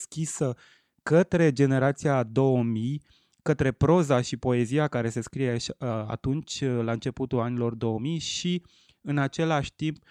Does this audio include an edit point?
no; 0 cuts

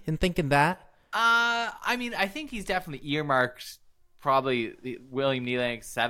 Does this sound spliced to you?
no; 0 cuts

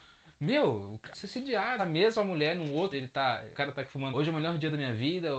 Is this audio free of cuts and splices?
no; 5 cuts; at 1.1 s, 1.8 s, 2.9 s, 3.5 s, 4.1 s

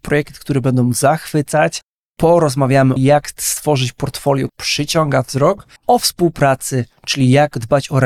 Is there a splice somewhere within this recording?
yes; 3 cuts; at 3.0 s, 4.5 s, 5.8 s

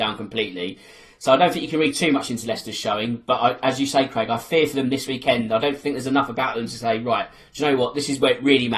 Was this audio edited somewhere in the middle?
no; 0 cuts

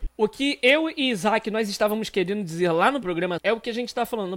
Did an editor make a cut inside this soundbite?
yes; 1 cut; at 3.0 s

